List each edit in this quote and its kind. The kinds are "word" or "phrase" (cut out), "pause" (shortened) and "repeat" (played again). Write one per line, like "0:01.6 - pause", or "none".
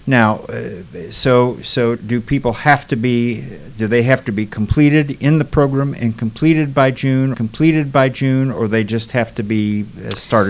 0:02.0 - word
0:07.3 - repeat